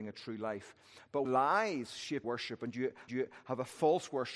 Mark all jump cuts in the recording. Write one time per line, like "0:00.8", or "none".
0:01.2
0:02.2
0:03.1

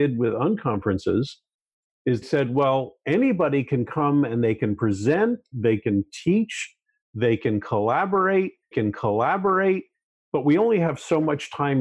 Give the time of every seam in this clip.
0:02.2
0:08.7

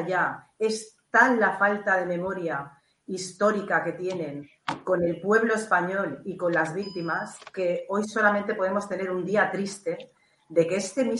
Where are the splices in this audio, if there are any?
none

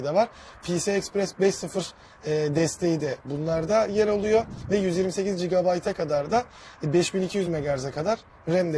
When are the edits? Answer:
none

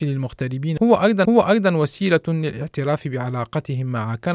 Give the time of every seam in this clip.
0:01.2

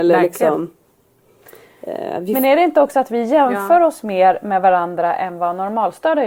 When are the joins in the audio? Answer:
none

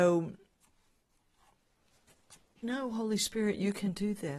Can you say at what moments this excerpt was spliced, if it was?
0:02.6

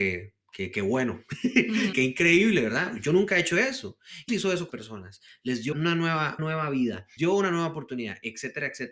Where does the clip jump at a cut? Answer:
0:01.9
0:04.3
0:04.7
0:05.7
0:06.4
0:07.2

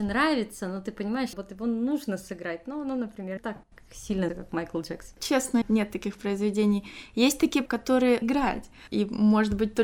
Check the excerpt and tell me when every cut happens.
0:01.3
0:03.4
0:04.3
0:05.6
0:07.7
0:08.2

